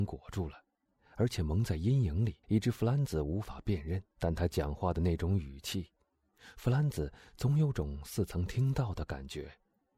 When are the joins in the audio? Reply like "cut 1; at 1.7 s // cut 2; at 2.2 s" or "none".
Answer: cut 1; at 2.4 s // cut 2; at 4.1 s